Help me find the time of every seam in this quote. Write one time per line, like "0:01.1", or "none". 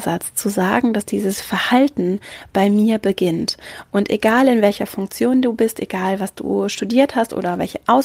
none